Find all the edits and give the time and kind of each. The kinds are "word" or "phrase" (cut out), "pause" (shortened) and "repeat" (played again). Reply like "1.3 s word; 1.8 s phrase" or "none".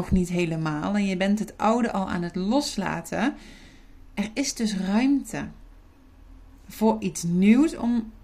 none